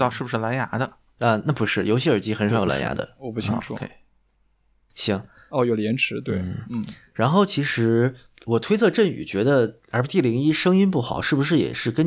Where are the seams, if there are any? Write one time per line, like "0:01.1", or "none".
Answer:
none